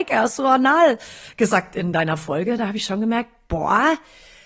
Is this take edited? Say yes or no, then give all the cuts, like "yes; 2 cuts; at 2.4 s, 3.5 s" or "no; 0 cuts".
no; 0 cuts